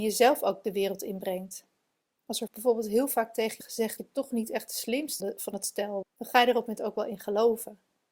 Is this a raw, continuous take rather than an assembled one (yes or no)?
no